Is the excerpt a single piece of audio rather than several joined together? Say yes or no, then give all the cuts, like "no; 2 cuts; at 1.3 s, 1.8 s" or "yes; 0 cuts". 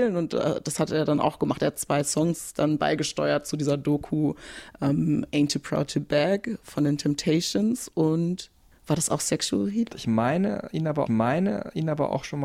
no; 2 cuts; at 8.7 s, 11.1 s